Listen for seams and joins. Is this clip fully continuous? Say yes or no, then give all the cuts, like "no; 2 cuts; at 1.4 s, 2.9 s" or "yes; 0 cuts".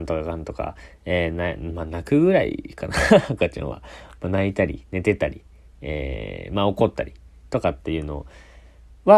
yes; 0 cuts